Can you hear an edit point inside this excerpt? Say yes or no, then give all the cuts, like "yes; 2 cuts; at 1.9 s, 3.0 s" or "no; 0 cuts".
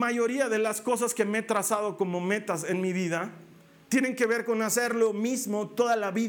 no; 0 cuts